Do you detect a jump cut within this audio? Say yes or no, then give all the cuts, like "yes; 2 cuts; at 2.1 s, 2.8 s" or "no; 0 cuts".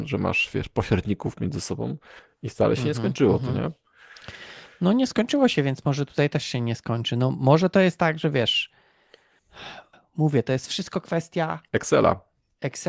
no; 0 cuts